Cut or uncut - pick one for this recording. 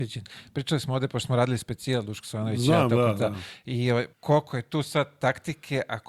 cut